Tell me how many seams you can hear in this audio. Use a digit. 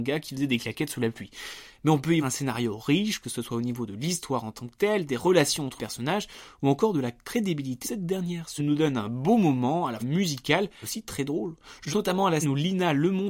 8